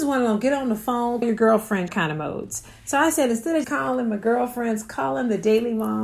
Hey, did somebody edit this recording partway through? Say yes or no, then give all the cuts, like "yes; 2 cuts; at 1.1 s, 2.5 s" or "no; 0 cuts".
yes; 3 cuts; at 1.2 s, 1.9 s, 3.6 s